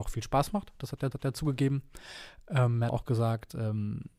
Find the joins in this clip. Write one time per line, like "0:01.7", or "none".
0:01.1
0:02.9